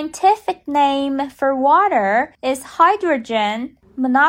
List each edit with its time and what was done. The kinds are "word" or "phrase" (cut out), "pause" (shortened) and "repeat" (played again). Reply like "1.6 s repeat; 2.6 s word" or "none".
2.3 s pause